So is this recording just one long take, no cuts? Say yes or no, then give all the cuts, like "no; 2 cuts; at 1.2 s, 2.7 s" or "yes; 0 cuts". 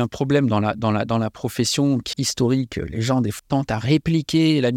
no; 2 cuts; at 2.1 s, 3.4 s